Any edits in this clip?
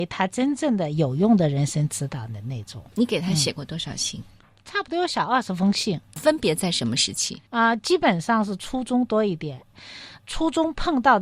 yes; 3 cuts; at 2.9 s, 6.2 s, 7.5 s

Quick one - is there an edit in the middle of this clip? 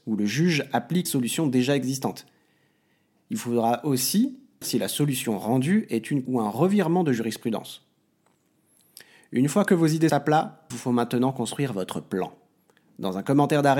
yes; 5 cuts; at 1.1 s, 4.6 s, 6.3 s, 10.1 s, 10.7 s

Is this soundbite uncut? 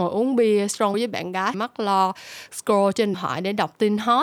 no; 3 cuts; at 0.9 s, 1.5 s, 3.1 s

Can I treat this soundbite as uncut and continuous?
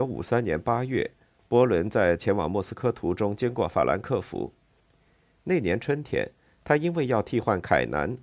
yes; 0 cuts

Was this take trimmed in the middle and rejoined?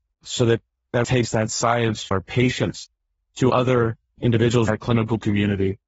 yes; 4 cuts; at 1.0 s, 2.1 s, 3.5 s, 4.7 s

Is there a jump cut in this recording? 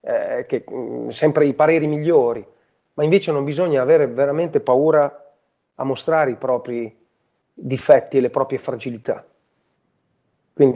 no; 0 cuts

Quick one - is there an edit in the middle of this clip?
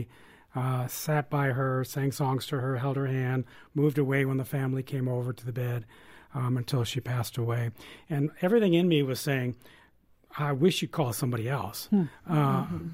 no; 0 cuts

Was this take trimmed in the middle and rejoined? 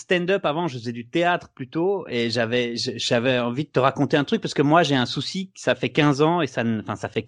no; 0 cuts

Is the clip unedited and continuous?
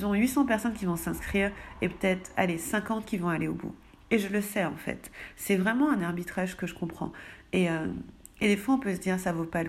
yes; 0 cuts

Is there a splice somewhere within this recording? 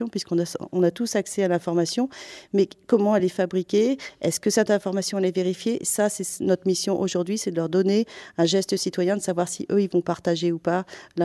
no; 0 cuts

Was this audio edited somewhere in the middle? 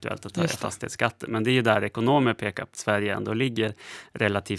yes; 1 cut; at 2.7 s

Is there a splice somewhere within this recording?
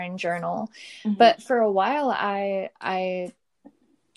no; 0 cuts

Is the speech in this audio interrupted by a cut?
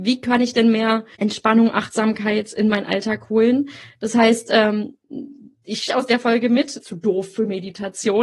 yes; 3 cuts; at 1.1 s, 5.9 s, 6.8 s

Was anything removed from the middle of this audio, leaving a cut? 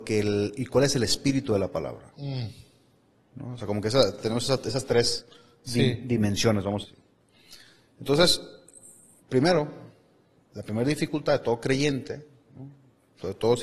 yes; 1 cut; at 6.8 s

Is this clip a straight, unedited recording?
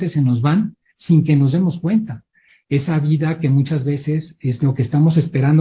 yes; 0 cuts

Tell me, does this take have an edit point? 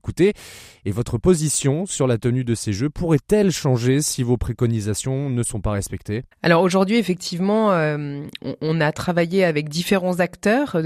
yes; 1 cut; at 6.3 s

